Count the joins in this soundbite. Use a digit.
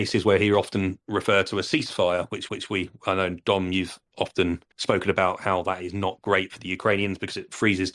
2